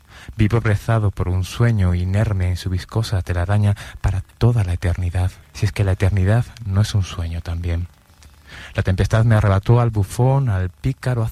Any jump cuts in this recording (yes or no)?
yes